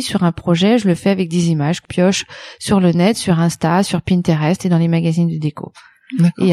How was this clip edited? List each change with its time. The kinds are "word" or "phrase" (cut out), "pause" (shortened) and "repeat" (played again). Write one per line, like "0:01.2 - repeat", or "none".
0:01.8 - word